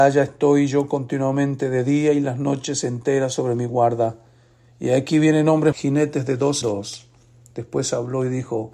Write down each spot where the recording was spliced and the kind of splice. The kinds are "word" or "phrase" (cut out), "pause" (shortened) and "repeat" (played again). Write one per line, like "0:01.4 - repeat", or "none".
0:05.7 - word
0:06.6 - word